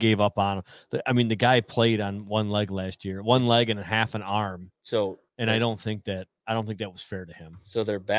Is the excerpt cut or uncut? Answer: cut